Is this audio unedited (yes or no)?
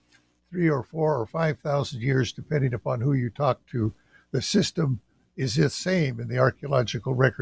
yes